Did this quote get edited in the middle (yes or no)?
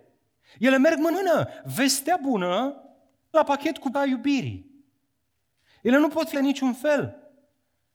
yes